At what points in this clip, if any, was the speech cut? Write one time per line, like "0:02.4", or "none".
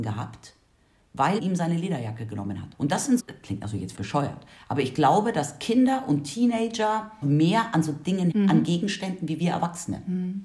0:01.4
0:02.7
0:03.2
0:04.0
0:07.2
0:08.3